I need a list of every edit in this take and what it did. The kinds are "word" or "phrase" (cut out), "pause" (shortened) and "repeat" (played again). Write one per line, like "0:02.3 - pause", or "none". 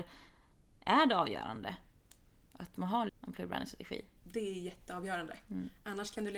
0:03.1 - word